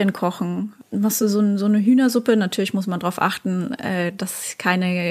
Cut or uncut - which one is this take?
uncut